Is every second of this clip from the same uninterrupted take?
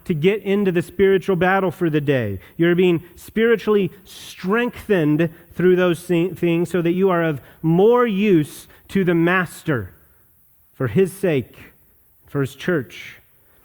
yes; 0 cuts

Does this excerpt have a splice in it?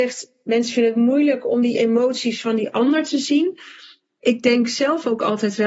no; 0 cuts

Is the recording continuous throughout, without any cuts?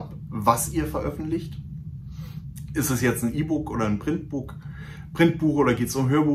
yes; 0 cuts

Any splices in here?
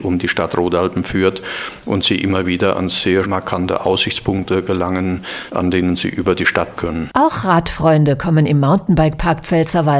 yes; 2 cuts; at 3.2 s, 6.8 s

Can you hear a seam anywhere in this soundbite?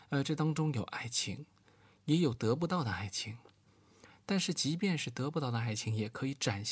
no; 0 cuts

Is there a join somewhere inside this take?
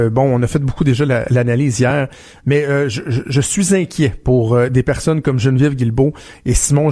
no; 0 cuts

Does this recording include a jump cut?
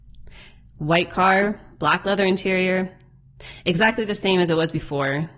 no; 0 cuts

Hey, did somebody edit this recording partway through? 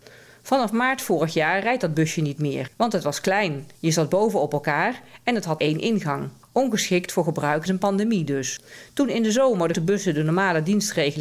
yes; 6 cuts; at 2.7 s, 3.7 s, 5.6 s, 6.4 s, 7.7 s, 9.7 s

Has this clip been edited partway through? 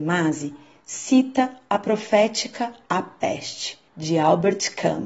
yes; 2 cuts; at 2.8 s, 3.9 s

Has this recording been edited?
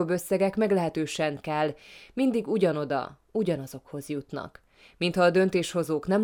yes; 1 cut; at 1.4 s

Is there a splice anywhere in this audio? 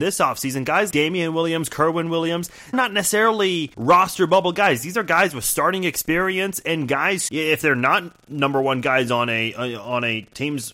yes; 4 cuts; at 0.9 s, 2.7 s, 3.7 s, 7.3 s

